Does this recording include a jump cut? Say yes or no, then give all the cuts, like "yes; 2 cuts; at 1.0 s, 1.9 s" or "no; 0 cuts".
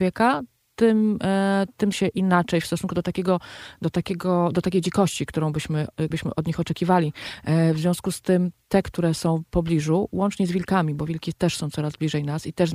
yes; 2 cuts; at 1.9 s, 6.1 s